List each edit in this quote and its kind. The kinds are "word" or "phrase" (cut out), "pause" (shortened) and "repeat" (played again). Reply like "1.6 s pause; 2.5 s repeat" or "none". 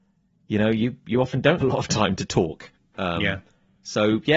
1.6 s word